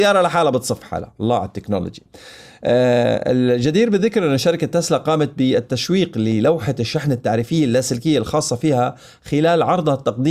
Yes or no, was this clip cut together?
no